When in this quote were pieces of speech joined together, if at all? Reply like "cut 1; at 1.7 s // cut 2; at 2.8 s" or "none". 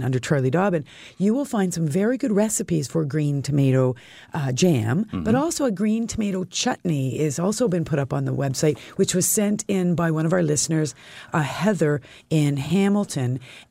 none